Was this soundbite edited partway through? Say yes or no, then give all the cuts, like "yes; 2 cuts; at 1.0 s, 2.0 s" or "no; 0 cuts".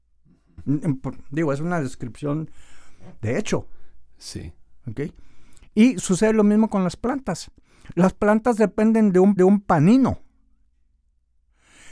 yes; 1 cut; at 9.4 s